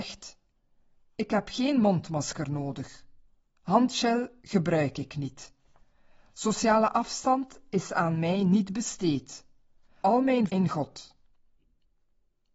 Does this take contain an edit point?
yes; 2 cuts; at 10.0 s, 10.5 s

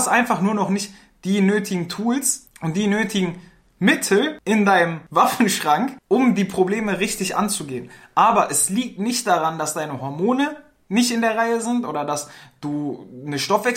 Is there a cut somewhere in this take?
no; 0 cuts

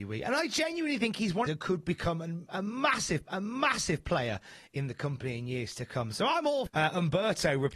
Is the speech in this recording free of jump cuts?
no; 3 cuts; at 1.5 s, 3.3 s, 6.7 s

